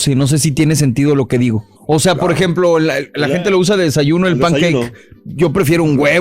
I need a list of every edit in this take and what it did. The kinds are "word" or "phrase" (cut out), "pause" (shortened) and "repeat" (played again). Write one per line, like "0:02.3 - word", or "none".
0:01.8 - pause